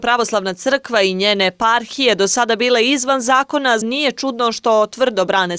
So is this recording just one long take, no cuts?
no; 1 cut; at 3.8 s

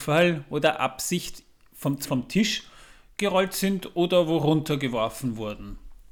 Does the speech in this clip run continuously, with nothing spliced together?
no; 1 cut; at 2.0 s

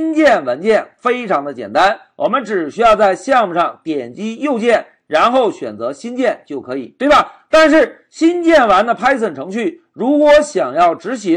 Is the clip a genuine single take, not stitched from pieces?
yes; 0 cuts

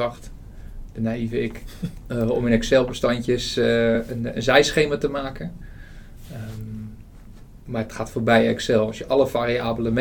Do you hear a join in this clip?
no; 0 cuts

